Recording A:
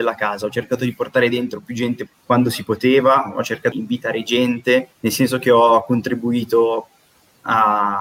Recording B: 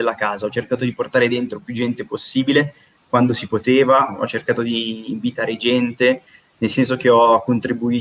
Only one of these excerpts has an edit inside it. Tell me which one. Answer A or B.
A